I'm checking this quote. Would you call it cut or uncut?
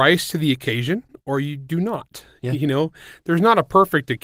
uncut